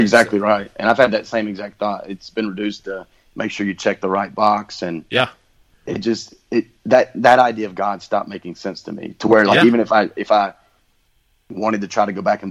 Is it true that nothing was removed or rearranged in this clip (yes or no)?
yes